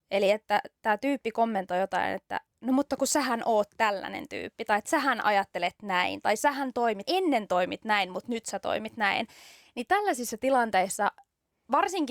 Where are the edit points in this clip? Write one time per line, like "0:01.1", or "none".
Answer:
0:07.1